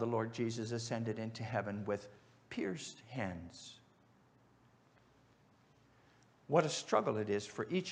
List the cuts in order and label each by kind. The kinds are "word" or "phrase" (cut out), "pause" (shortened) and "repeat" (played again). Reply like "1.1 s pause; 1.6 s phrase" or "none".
none